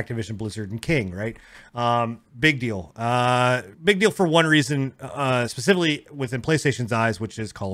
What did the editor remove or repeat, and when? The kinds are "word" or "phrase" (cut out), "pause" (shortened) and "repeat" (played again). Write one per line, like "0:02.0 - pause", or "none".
0:02.3 - pause
0:03.7 - pause